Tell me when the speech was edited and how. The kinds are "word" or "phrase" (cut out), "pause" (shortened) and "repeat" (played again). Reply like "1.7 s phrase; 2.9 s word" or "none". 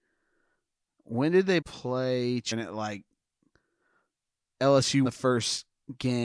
1.6 s word; 2.5 s word; 5.0 s word